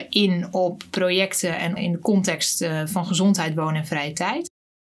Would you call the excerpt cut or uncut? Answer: cut